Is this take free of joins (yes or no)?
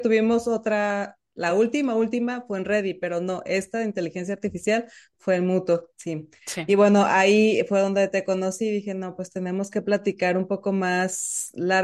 yes